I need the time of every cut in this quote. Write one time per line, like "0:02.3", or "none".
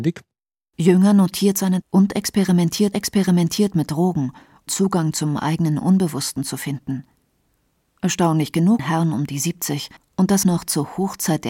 0:01.8
0:02.9
0:04.7
0:08.8
0:10.0
0:10.4